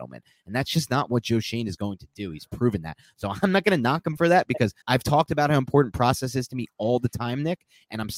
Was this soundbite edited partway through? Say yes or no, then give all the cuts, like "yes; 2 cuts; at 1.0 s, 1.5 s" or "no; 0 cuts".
yes; 1 cut; at 4.8 s